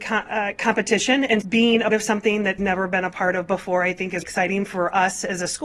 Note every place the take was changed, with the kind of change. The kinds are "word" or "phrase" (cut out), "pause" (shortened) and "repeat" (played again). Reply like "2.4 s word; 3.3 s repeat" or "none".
1.4 s word; 1.9 s word; 2.6 s word; 4.2 s word